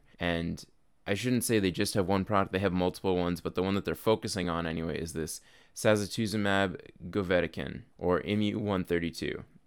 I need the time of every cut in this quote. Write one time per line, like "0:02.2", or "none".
none